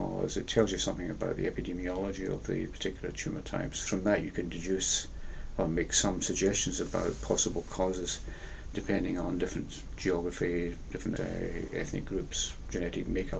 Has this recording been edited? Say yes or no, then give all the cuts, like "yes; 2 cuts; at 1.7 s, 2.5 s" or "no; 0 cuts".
yes; 1 cut; at 11.2 s